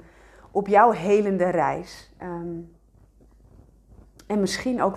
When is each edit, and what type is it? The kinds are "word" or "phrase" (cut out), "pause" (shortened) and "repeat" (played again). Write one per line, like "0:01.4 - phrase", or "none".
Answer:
none